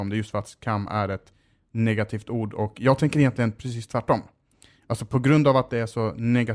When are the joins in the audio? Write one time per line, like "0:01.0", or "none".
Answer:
none